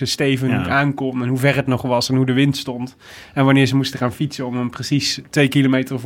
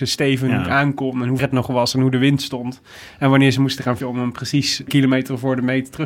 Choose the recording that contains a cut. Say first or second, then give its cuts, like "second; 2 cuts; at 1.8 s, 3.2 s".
second; 3 cuts; at 1.4 s, 4.0 s, 4.9 s